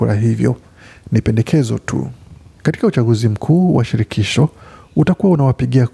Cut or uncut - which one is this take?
uncut